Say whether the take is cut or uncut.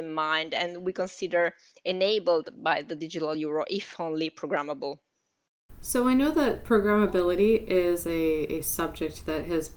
uncut